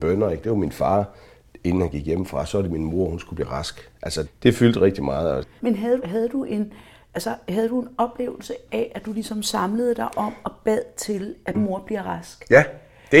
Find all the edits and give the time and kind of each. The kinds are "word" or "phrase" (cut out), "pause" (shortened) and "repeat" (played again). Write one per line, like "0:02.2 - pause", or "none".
0:04.2 - word
0:06.0 - word
0:11.5 - word